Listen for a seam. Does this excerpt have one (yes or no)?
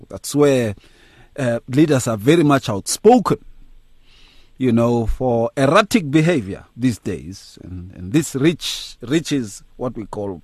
yes